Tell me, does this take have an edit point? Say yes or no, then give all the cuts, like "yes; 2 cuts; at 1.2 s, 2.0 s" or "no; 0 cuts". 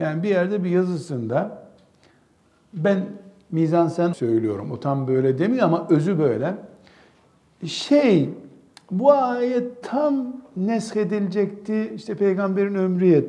yes; 1 cut; at 4.1 s